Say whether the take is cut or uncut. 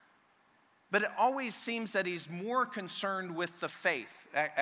uncut